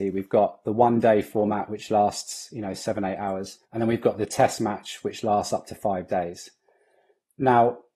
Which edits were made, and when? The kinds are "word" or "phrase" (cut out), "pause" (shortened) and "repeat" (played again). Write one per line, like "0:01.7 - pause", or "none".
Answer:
0:03.6 - pause